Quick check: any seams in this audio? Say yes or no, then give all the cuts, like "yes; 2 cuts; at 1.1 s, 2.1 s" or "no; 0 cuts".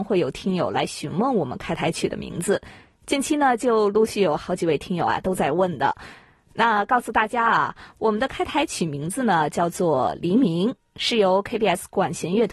no; 0 cuts